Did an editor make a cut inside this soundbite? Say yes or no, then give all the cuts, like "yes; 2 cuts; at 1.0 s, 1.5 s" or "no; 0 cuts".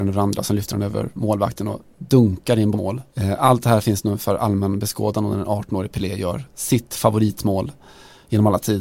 yes; 2 cuts; at 2.7 s, 3.1 s